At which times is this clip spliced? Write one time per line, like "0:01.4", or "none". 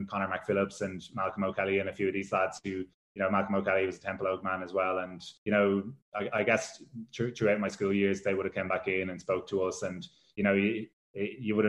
0:05.4